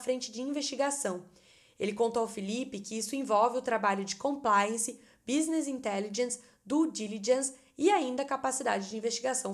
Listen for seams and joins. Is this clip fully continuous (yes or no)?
yes